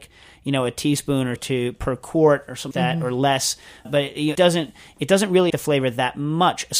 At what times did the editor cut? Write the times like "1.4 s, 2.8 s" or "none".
1.4 s, 2.7 s, 3.8 s, 4.3 s, 5.5 s